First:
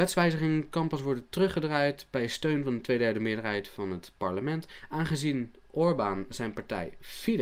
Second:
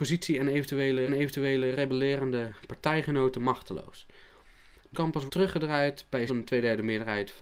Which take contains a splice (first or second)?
second